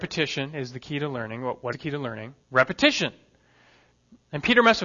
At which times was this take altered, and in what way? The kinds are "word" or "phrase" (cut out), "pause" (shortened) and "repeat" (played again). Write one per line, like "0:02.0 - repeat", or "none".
0:01.7 - word
0:02.4 - pause

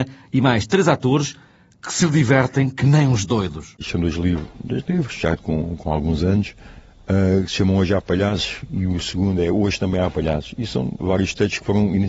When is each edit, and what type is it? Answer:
none

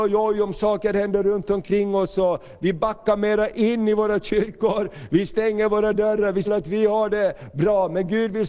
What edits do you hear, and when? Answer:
0:06.5 - phrase

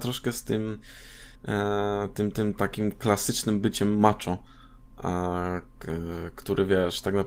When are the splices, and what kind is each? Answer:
0:01.3 - pause

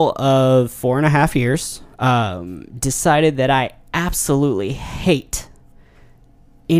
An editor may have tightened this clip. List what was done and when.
0:01.9 - pause

